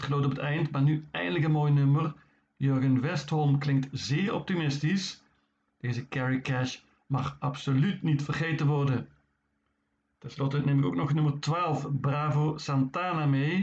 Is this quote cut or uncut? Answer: uncut